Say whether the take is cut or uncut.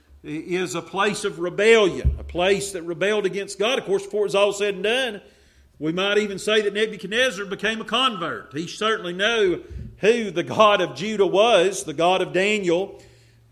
uncut